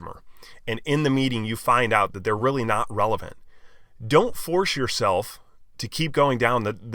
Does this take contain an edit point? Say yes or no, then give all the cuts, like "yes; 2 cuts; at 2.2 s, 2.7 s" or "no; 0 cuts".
no; 0 cuts